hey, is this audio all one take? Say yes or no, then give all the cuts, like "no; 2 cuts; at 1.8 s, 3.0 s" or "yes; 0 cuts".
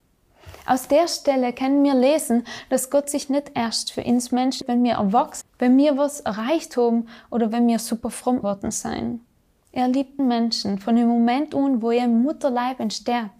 no; 4 cuts; at 4.6 s, 5.4 s, 8.4 s, 10.2 s